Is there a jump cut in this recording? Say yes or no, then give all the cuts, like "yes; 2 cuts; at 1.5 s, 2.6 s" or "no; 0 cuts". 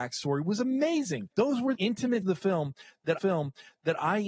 yes; 4 cuts; at 1.3 s, 1.7 s, 2.2 s, 3.2 s